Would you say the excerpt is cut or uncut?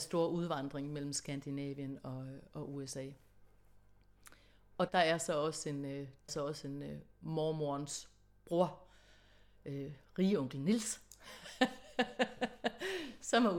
cut